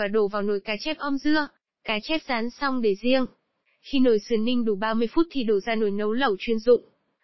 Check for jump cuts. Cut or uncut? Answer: uncut